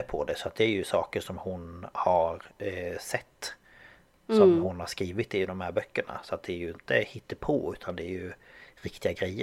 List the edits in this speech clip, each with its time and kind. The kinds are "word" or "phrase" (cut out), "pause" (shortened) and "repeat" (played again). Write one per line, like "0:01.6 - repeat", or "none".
0:02.5 - pause